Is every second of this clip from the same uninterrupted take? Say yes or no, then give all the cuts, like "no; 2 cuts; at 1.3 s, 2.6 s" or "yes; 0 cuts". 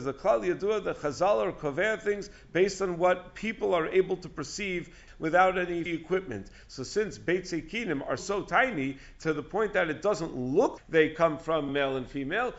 no; 5 cuts; at 5.1 s, 5.9 s, 8.2 s, 10.8 s, 11.7 s